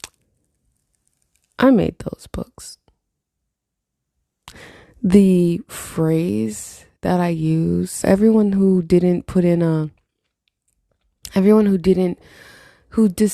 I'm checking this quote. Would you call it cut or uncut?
cut